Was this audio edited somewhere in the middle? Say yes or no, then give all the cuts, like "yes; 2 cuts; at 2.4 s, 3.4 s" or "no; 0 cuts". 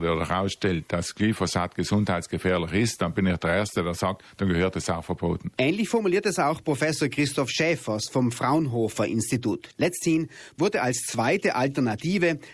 no; 0 cuts